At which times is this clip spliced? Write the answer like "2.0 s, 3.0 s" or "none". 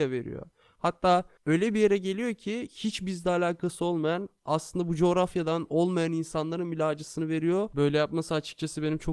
1.4 s

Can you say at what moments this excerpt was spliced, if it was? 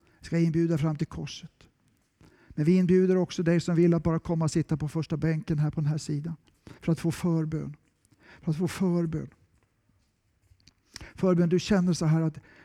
6.8 s

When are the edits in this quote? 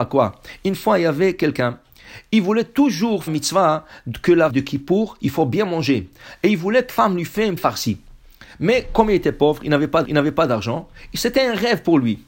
3.3 s, 4.5 s, 6.9 s, 7.6 s, 10.0 s

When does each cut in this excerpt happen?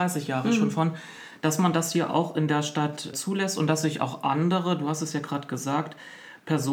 3.1 s

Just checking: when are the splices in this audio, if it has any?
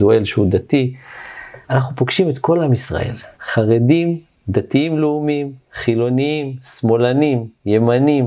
1.6 s, 3.3 s

